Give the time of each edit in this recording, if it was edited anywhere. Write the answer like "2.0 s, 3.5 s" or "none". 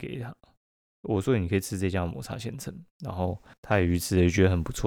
3.5 s